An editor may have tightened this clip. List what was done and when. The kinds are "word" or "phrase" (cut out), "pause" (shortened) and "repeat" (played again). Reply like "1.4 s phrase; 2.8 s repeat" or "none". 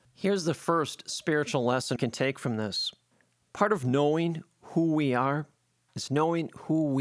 2.0 s word